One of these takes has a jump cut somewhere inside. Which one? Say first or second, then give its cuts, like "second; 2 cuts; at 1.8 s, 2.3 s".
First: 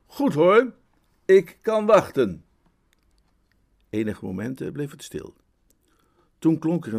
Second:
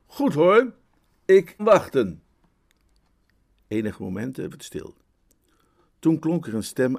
second; 2 cuts; at 1.6 s, 4.5 s